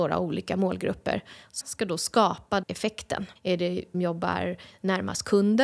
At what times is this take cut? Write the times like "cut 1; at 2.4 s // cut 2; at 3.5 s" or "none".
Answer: cut 1; at 1.6 s // cut 2; at 2.6 s // cut 3; at 3.4 s // cut 4; at 3.9 s